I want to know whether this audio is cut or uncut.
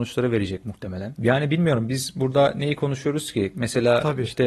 uncut